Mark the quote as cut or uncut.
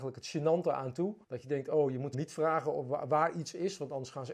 cut